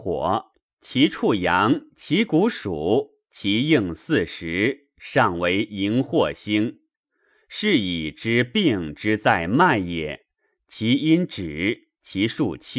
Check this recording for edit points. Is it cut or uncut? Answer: uncut